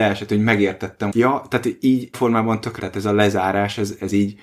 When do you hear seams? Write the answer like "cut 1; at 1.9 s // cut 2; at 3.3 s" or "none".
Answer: cut 1; at 1.1 s // cut 2; at 2.1 s // cut 3; at 2.8 s